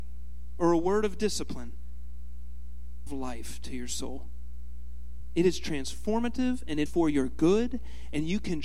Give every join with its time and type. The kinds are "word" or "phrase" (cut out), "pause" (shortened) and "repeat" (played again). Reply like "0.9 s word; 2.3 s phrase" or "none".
3.1 s phrase; 6.9 s word